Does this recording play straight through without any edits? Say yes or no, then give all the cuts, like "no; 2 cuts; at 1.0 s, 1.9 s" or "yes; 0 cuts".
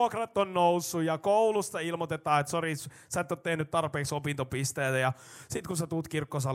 yes; 0 cuts